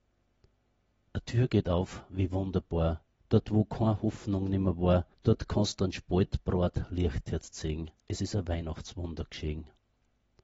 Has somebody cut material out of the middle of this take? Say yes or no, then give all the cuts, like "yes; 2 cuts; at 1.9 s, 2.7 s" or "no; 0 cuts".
yes; 3 cuts; at 3.2 s, 5.1 s, 8.0 s